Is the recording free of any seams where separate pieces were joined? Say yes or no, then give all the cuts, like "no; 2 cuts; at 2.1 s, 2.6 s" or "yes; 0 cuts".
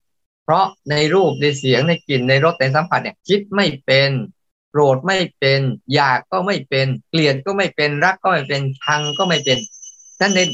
no; 1 cut; at 3.2 s